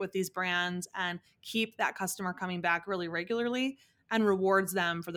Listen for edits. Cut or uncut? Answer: uncut